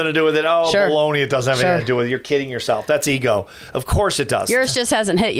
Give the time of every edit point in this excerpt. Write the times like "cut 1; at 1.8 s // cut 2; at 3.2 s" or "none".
none